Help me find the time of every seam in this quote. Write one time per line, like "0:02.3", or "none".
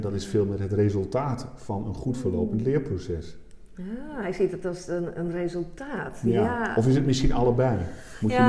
none